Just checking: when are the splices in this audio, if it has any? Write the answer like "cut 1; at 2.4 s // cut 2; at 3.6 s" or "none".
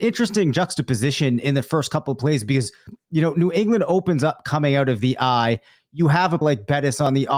cut 1; at 6.4 s